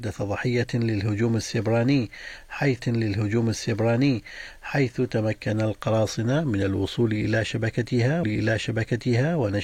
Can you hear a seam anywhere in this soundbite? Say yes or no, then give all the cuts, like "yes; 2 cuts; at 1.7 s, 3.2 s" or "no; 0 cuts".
yes; 2 cuts; at 2.8 s, 8.2 s